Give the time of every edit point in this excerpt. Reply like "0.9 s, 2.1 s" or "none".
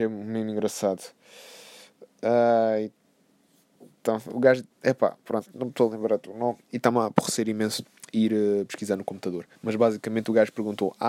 4.7 s, 9.6 s